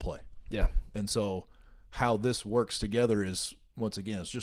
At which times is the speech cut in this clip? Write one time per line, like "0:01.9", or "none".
none